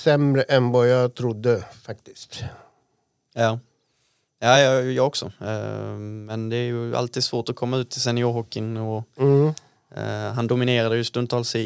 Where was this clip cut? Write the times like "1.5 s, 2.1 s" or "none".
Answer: none

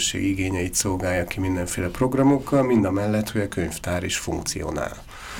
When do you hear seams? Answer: none

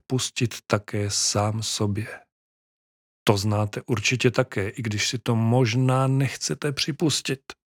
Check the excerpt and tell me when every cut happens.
none

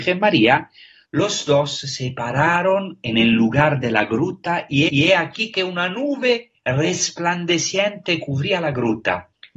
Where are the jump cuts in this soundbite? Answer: 4.9 s

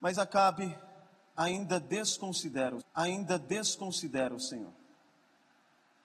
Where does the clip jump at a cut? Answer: 2.8 s

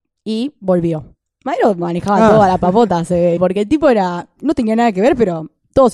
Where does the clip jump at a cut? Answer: 3.4 s

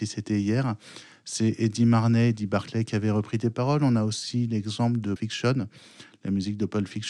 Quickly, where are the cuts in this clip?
5.2 s

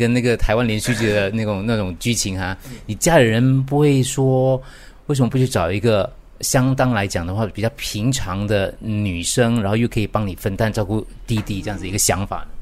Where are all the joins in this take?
none

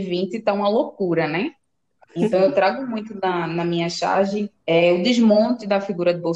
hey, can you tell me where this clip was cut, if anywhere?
4.6 s

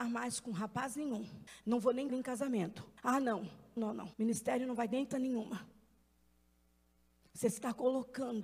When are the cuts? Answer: 1.5 s, 2.1 s, 3.0 s, 3.8 s, 4.1 s, 5.1 s

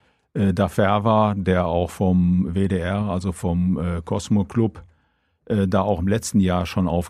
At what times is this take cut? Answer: none

